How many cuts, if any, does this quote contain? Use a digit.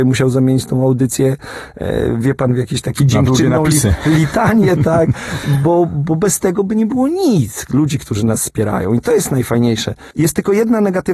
1